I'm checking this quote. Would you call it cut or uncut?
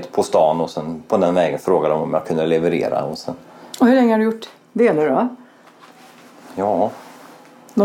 uncut